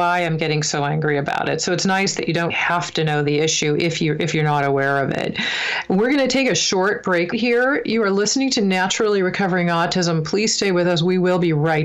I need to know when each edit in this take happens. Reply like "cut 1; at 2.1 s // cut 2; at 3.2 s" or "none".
cut 1; at 2.5 s // cut 2; at 7.3 s